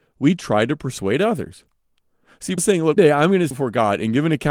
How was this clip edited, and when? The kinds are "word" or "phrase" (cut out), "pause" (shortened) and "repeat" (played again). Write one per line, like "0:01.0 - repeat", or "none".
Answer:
0:02.6 - word
0:03.0 - word
0:03.5 - word